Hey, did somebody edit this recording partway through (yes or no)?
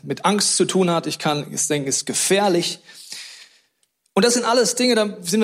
no